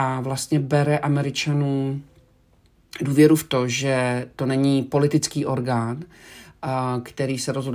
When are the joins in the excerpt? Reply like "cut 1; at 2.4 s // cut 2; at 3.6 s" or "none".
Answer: none